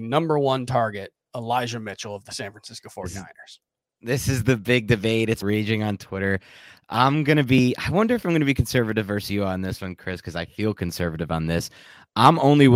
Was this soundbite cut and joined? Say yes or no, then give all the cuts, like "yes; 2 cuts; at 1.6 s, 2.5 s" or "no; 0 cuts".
yes; 1 cut; at 5.4 s